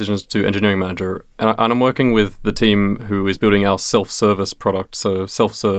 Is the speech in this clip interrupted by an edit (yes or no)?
no